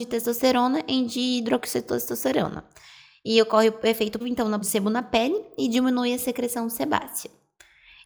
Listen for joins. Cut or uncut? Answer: cut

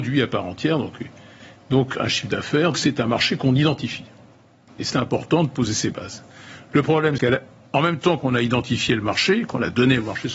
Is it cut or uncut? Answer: cut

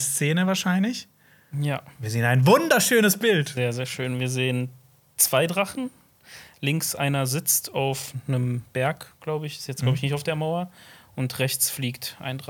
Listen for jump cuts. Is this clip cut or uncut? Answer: uncut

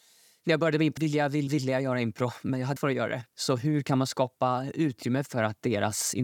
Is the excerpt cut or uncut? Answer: cut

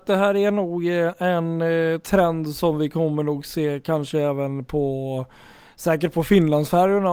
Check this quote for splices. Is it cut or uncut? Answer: uncut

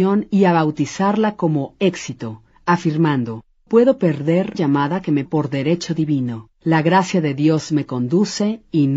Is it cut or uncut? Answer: cut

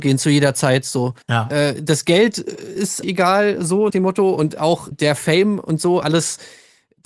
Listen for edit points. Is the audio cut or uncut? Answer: cut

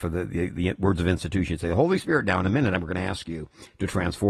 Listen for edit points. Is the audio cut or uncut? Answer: uncut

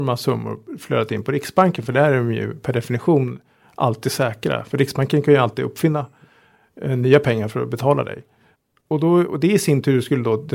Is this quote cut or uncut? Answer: uncut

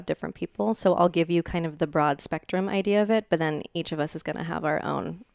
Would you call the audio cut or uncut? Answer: uncut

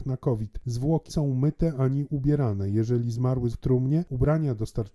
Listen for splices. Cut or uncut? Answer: cut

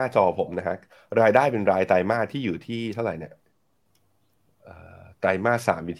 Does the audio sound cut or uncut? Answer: uncut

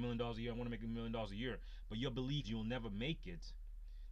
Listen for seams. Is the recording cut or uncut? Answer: cut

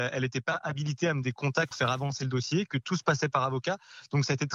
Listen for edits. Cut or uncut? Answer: cut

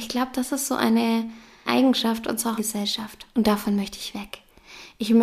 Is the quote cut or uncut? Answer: cut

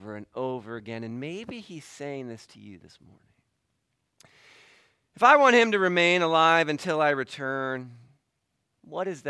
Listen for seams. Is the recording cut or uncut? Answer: uncut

